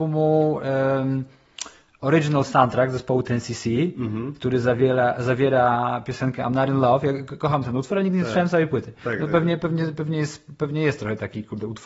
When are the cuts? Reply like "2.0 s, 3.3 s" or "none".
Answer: none